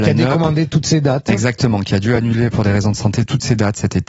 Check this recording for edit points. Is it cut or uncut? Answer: uncut